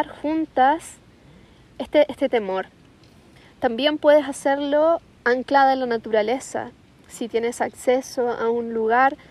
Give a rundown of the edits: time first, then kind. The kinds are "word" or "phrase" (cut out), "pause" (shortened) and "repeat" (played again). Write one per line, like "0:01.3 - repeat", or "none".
none